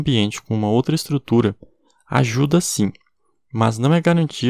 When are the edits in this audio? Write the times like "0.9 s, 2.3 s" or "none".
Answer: none